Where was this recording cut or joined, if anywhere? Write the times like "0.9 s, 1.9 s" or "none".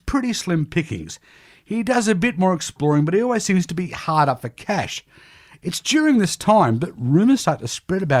none